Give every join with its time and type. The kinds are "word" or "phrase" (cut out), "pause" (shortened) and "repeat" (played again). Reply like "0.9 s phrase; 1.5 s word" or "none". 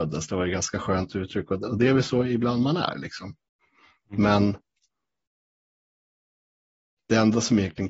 none